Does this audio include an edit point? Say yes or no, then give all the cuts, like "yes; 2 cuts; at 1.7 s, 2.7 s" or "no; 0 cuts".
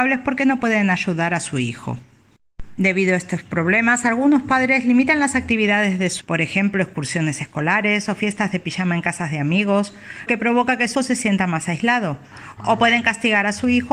yes; 3 cuts; at 6.2 s, 10.3 s, 10.9 s